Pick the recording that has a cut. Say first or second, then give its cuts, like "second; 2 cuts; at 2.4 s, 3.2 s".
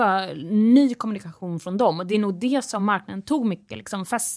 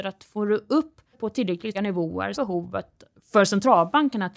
second; 3 cuts; at 1.1 s, 1.7 s, 2.3 s